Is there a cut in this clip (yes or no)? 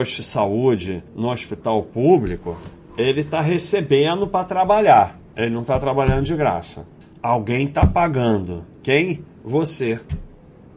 yes